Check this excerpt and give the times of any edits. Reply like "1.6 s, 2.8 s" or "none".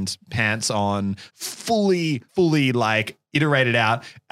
1.3 s, 2.3 s, 3.2 s

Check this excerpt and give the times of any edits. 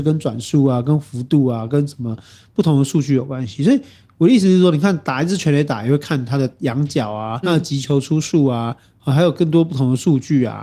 7.4 s

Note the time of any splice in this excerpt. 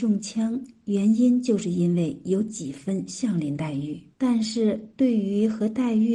4.1 s

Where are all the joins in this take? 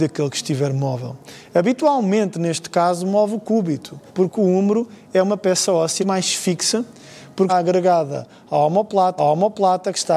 4.1 s, 6.0 s, 7.5 s, 9.2 s

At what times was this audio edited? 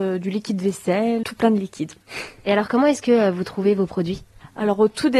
1.2 s

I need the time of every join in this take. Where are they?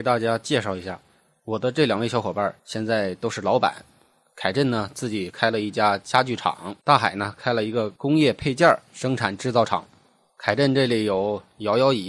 2.6 s, 6.8 s

